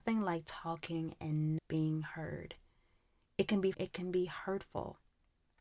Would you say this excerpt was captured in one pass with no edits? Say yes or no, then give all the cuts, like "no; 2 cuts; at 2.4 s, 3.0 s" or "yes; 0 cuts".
no; 2 cuts; at 1.6 s, 3.7 s